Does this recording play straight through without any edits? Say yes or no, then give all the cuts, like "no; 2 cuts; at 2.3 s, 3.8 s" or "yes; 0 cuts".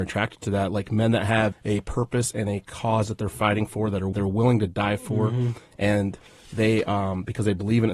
no; 2 cuts; at 1.5 s, 4.1 s